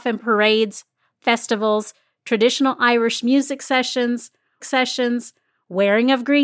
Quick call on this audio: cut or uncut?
cut